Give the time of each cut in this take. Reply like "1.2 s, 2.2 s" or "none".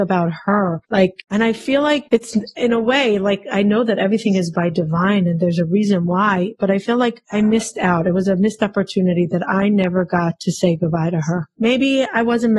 none